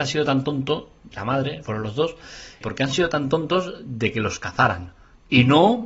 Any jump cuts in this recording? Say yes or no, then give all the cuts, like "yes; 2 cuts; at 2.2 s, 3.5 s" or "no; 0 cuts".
yes; 3 cuts; at 1.1 s, 1.6 s, 2.6 s